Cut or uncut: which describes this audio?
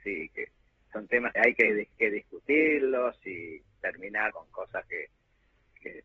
cut